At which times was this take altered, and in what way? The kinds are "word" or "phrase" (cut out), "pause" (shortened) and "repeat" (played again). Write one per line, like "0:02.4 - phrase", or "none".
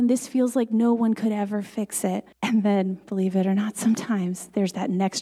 0:02.3 - pause